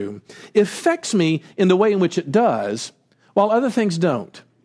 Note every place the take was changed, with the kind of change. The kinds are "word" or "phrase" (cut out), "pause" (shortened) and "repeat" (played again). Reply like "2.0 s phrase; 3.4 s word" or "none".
none